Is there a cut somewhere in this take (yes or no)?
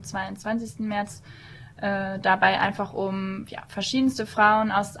no